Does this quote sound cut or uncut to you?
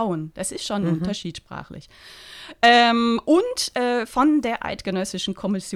uncut